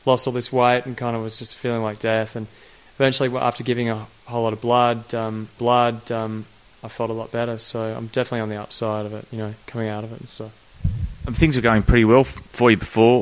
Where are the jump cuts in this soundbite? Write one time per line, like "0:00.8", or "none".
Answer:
0:05.6